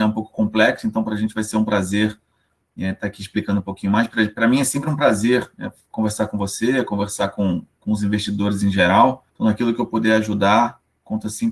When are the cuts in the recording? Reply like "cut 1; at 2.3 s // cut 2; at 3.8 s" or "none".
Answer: cut 1; at 9.3 s